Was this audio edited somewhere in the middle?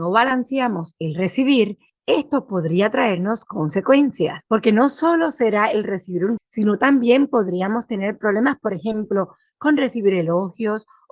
yes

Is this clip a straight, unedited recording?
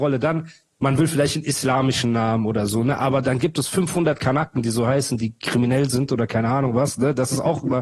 yes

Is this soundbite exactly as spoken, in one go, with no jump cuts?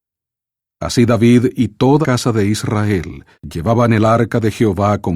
no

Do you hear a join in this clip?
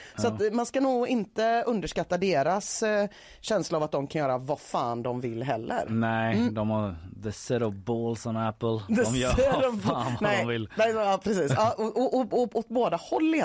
no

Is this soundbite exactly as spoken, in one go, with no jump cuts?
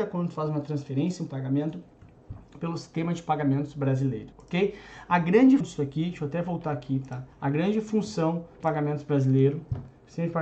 no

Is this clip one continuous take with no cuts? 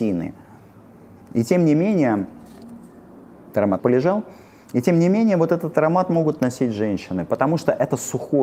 no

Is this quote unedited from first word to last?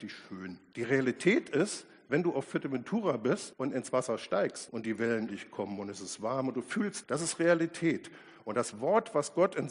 no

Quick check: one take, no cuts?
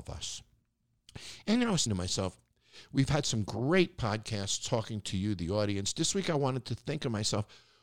no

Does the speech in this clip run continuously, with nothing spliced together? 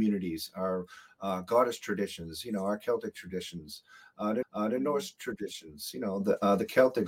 no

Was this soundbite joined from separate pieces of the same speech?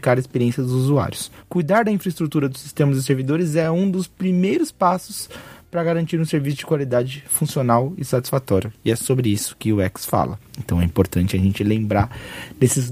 no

